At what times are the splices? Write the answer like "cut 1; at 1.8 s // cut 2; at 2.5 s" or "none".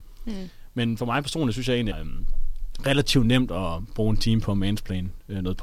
cut 1; at 1.9 s